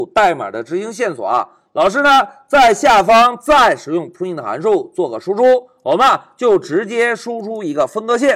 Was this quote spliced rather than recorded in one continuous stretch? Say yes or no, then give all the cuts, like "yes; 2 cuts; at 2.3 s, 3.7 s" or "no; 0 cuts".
no; 0 cuts